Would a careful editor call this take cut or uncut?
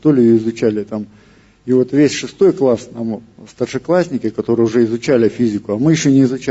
uncut